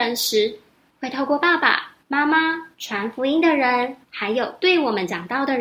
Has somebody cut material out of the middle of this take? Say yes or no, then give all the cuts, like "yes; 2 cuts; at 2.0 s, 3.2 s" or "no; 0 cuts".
yes; 3 cuts; at 2.0 s, 2.7 s, 4.0 s